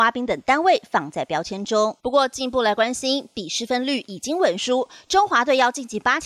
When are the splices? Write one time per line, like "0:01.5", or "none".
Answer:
0:02.0